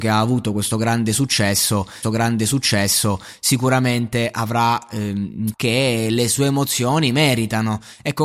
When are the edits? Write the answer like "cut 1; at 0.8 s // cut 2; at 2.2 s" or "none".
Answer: cut 1; at 2.0 s // cut 2; at 5.5 s